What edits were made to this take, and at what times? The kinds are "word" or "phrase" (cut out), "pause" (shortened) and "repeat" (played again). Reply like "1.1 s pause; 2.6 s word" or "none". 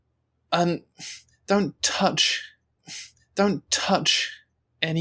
2.8 s repeat